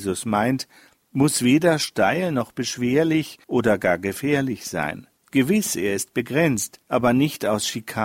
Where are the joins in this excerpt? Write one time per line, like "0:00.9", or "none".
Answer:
0:03.4
0:05.2
0:06.8